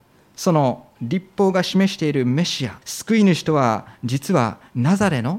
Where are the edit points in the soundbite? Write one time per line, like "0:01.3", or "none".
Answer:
0:02.8